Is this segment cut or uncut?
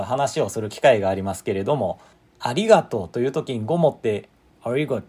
cut